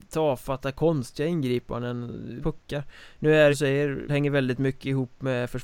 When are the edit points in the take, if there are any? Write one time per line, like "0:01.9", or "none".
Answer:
0:02.4
0:03.5
0:04.1